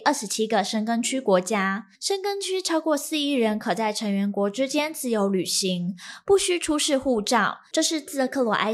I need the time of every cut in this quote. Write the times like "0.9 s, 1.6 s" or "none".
1.9 s, 7.7 s